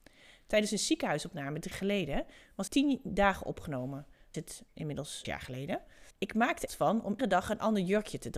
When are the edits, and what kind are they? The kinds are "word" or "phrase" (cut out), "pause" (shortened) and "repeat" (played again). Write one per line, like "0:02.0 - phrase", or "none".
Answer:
0:01.7 - word
0:02.7 - word
0:04.3 - phrase
0:05.2 - word
0:06.1 - pause
0:06.7 - phrase
0:07.2 - word